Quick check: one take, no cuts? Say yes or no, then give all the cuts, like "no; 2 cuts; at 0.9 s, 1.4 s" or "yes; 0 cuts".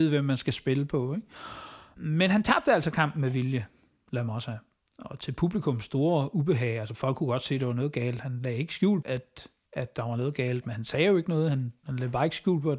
no; 3 cuts; at 9.0 s, 9.7 s, 11.8 s